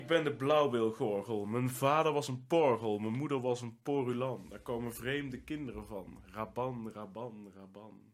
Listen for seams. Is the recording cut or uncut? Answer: uncut